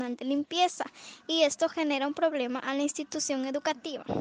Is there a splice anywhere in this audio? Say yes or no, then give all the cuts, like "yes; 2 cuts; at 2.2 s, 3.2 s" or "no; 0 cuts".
no; 0 cuts